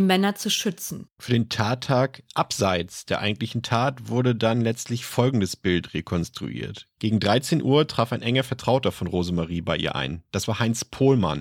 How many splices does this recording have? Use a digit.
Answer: 1